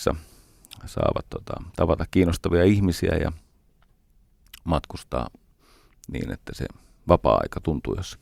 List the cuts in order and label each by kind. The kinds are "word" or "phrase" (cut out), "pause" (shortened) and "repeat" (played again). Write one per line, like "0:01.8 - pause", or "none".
none